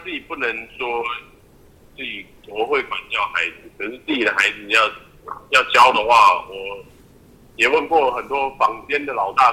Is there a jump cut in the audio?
no; 0 cuts

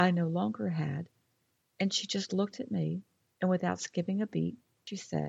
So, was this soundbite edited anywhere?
no; 0 cuts

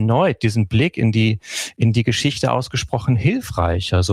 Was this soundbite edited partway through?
no; 0 cuts

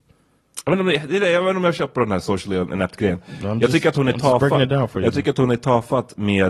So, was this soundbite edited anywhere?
no; 0 cuts

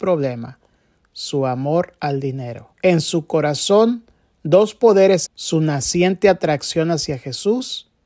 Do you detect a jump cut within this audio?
yes; 2 cuts; at 2.7 s, 5.3 s

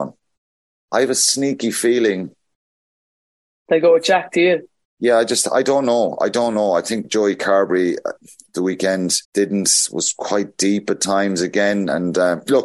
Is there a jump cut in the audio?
yes; 2 cuts; at 7.0 s, 9.2 s

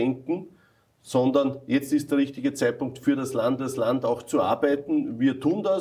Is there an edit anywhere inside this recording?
yes; 1 cut; at 3.6 s

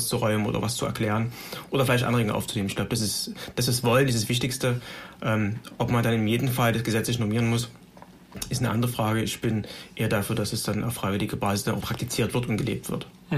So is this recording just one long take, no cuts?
no; 1 cut; at 11.8 s

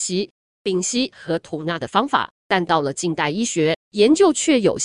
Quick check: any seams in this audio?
yes; 2 cuts; at 2.4 s, 3.8 s

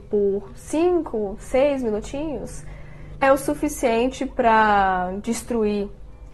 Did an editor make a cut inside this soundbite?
yes; 1 cut; at 3.2 s

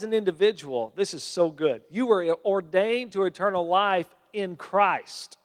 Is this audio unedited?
yes; 0 cuts

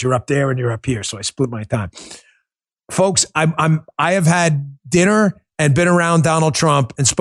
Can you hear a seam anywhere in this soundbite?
no; 0 cuts

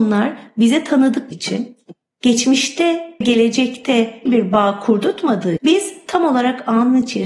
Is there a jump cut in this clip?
yes; 4 cuts; at 1.3 s, 3.2 s, 4.3 s, 5.6 s

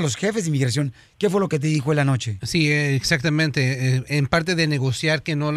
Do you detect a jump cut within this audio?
no; 0 cuts

